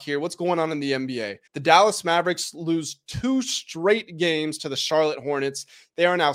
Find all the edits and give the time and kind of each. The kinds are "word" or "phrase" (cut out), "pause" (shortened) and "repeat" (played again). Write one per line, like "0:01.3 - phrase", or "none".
0:01.5 - pause